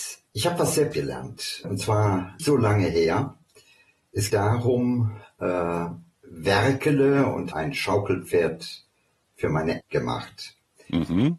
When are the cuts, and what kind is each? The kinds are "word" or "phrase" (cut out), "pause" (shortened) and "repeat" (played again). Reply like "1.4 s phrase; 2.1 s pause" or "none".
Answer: 0.9 s word; 1.6 s word; 2.4 s word; 4.3 s word; 6.1 s word; 7.5 s word; 9.8 s word